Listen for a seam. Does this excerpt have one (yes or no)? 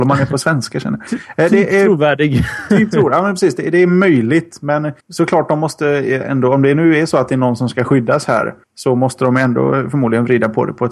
yes